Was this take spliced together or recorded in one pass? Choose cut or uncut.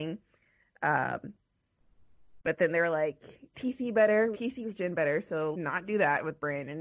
cut